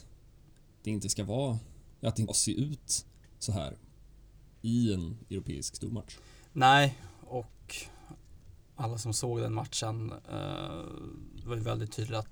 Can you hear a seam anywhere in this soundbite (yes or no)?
yes